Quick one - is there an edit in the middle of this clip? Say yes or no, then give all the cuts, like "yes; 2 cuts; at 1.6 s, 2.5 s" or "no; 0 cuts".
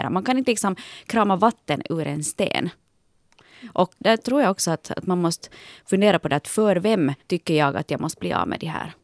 yes; 2 cuts; at 4.0 s, 7.2 s